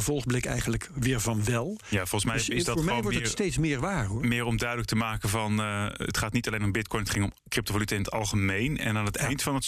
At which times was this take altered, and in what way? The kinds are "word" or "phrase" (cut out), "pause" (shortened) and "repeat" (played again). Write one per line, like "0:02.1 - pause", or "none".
0:07.4 - pause